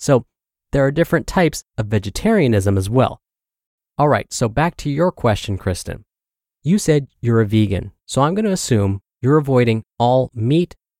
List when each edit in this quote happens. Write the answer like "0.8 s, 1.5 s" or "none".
none